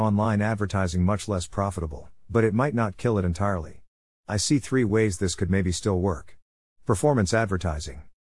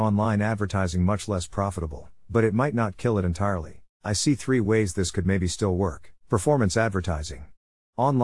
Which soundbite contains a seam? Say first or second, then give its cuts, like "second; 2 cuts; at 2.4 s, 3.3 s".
second; 2 cuts; at 3.9 s, 6.2 s